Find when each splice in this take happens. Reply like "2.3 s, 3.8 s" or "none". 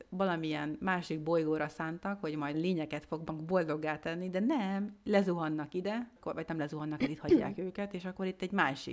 2.5 s, 6.2 s

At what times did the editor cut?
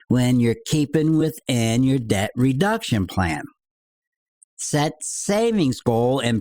none

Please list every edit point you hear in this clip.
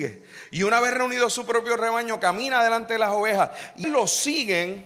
3.8 s

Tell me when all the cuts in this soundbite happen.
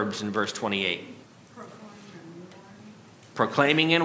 1.2 s

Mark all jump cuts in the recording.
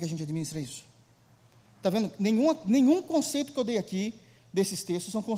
none

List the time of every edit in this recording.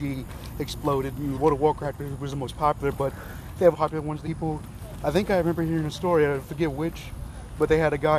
1.3 s, 3.7 s, 4.2 s

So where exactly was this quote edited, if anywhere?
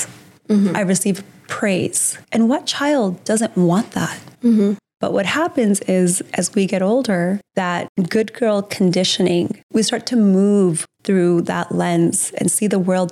2.2 s, 4.3 s, 7.5 s, 9.6 s

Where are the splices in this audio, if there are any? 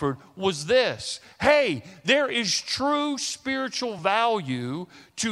none

